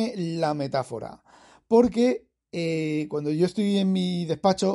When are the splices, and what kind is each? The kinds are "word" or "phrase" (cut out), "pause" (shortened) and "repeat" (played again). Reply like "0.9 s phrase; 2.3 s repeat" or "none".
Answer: none